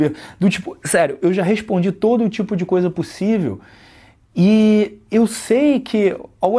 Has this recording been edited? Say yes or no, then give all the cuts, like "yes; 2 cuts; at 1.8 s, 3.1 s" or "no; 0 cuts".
no; 0 cuts